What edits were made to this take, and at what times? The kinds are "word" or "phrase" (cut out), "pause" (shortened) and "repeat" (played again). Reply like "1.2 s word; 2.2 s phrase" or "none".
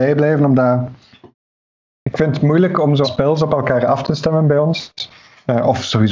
3.0 s word